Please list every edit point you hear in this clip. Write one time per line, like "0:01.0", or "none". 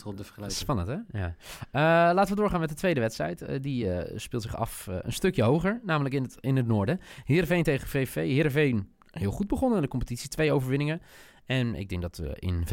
none